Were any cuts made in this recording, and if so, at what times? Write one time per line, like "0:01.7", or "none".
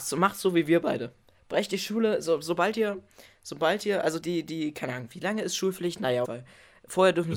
0:04.2
0:06.2